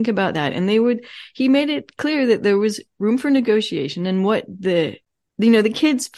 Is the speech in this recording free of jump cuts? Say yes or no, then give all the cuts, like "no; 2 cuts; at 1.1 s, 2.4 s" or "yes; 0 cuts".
yes; 0 cuts